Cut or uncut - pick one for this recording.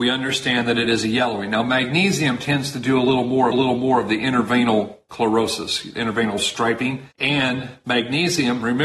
cut